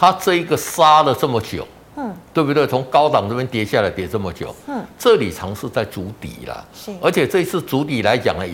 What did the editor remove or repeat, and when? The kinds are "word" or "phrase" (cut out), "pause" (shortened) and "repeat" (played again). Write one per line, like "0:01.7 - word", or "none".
none